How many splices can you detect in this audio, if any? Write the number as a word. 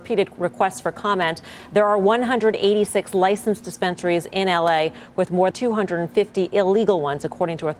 one